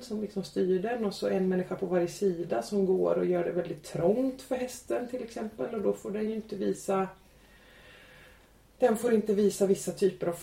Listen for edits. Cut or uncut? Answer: uncut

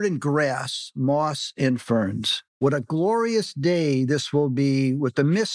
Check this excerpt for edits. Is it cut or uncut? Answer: cut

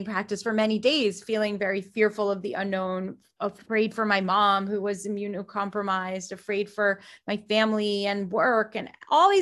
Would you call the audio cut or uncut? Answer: uncut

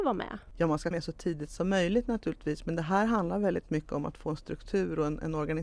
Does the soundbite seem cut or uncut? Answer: cut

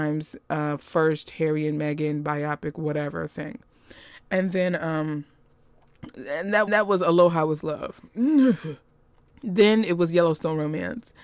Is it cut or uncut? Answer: cut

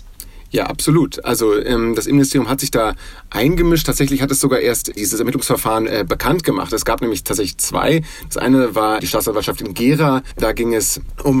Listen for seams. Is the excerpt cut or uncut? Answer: uncut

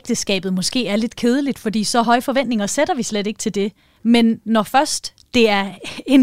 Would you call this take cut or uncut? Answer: uncut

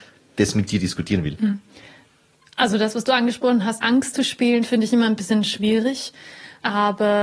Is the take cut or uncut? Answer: cut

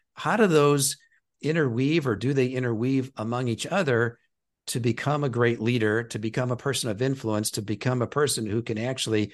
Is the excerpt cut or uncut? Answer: uncut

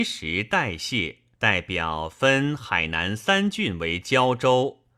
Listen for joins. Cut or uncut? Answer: cut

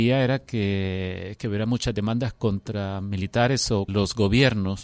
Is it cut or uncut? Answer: cut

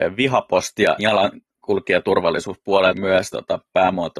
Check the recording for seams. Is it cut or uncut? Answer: cut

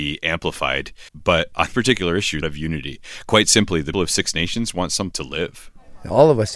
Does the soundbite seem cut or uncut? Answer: cut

